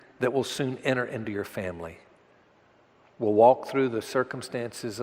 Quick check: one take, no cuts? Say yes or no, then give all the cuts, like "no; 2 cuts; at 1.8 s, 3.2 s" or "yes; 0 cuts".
yes; 0 cuts